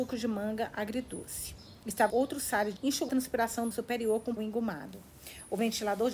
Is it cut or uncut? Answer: cut